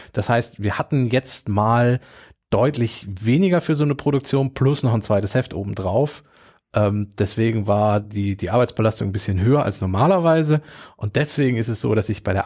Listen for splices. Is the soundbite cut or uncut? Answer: uncut